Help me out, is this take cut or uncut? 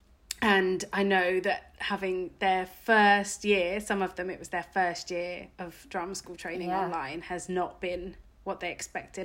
uncut